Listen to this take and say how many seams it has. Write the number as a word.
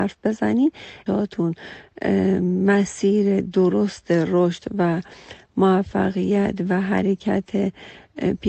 one